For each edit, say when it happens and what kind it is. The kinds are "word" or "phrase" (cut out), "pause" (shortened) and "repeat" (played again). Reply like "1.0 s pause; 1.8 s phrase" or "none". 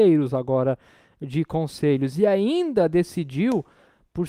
none